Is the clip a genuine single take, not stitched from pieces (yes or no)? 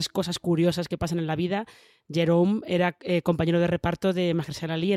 yes